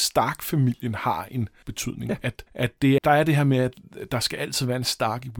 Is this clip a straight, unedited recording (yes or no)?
no